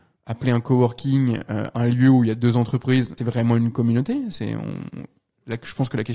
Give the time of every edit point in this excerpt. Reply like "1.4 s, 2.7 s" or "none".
3.2 s